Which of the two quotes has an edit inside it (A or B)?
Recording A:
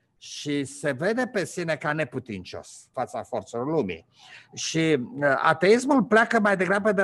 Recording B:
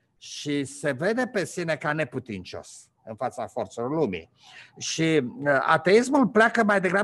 A